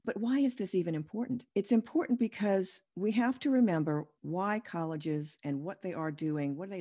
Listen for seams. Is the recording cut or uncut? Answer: uncut